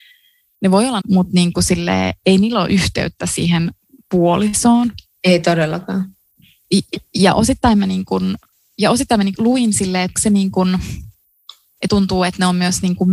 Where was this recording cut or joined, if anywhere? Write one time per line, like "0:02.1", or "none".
0:01.0
0:09.4
0:10.2
0:11.9